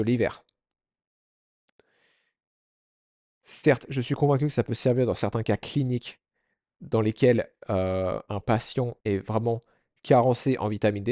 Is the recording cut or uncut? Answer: cut